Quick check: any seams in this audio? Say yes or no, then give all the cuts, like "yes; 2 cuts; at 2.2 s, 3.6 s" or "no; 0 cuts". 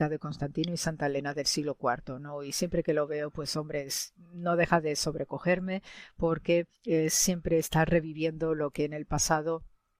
yes; 1 cut; at 6.7 s